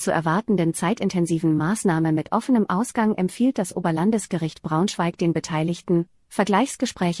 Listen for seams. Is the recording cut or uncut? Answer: uncut